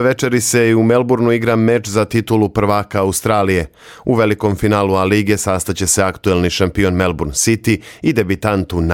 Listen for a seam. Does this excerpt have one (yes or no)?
no